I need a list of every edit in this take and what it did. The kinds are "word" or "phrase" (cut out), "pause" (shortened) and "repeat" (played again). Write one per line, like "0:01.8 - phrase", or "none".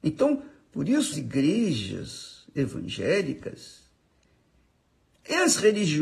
0:01.1 - word

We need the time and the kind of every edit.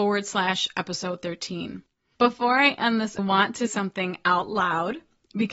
0:03.2 - phrase
0:03.7 - word

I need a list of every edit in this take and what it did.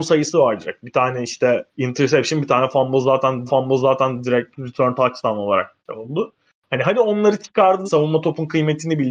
0:01.7 - pause
0:03.5 - repeat
0:05.8 - pause
0:07.9 - word

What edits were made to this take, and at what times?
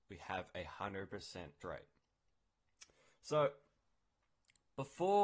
0:01.6 - word

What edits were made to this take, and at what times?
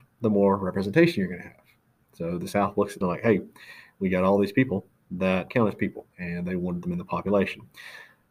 0:03.0 - phrase
0:05.5 - word
0:06.1 - pause
0:06.8 - phrase

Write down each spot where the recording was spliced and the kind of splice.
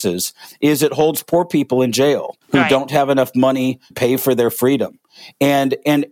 0:02.4 - pause
0:03.9 - word

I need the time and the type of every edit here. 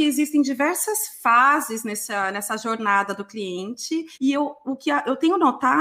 0:04.1 - pause

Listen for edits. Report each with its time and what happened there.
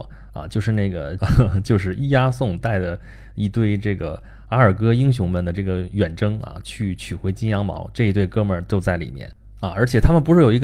0:01.2 - word

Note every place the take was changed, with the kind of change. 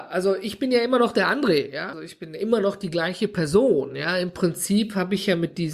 0:01.9 - word

